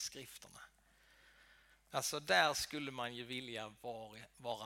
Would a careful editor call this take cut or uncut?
uncut